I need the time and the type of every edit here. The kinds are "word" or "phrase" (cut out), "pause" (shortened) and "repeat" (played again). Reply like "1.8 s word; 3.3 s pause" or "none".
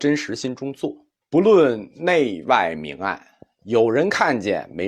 1.2 s pause